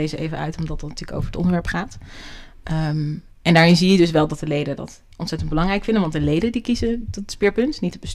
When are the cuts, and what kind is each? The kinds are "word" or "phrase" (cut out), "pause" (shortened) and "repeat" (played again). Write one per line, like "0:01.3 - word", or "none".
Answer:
0:05.1 - pause